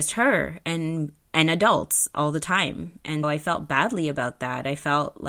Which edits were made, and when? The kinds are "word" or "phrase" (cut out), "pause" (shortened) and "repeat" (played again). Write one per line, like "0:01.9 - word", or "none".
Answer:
0:03.2 - word